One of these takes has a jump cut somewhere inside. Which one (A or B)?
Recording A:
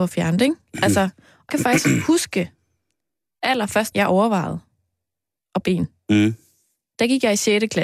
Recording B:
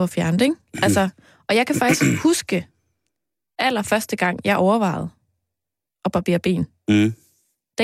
A